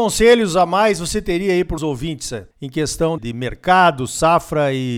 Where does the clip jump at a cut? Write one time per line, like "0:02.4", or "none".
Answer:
0:01.8
0:02.5
0:03.2